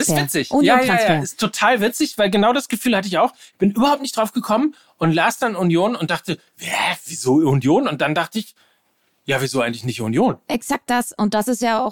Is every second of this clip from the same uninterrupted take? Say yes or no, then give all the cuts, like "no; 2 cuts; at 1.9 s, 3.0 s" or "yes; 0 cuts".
yes; 0 cuts